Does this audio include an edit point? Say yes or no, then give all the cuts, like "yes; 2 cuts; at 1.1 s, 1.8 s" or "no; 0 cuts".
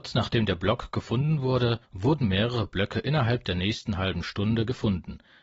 yes; 1 cut; at 1.8 s